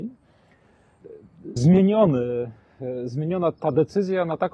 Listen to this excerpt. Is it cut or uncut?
cut